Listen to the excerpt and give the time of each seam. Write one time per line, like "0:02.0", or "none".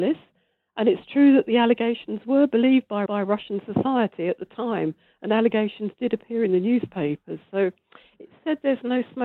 0:03.1